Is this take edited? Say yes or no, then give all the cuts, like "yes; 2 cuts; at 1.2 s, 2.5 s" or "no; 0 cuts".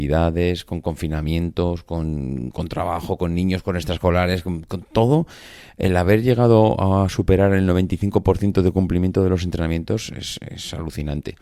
no; 0 cuts